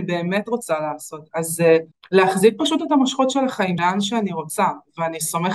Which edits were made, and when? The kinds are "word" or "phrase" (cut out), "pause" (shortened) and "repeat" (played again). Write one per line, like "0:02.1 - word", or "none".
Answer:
0:01.9 - pause
0:03.8 - phrase